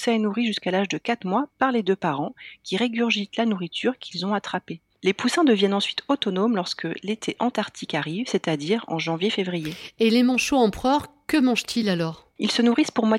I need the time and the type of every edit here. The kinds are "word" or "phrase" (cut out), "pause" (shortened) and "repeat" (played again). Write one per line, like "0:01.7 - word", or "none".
none